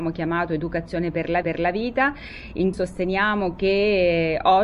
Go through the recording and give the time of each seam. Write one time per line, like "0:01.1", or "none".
0:01.4
0:02.7